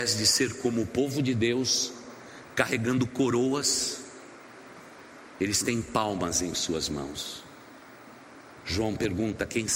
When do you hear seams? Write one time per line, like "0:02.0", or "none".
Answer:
none